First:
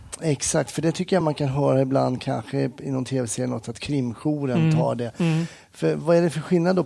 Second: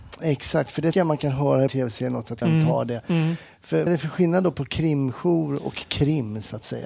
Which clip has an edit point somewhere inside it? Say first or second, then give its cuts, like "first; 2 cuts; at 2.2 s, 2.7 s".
second; 4 cuts; at 0.9 s, 1.7 s, 2.4 s, 3.9 s